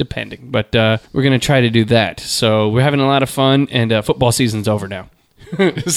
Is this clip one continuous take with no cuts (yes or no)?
no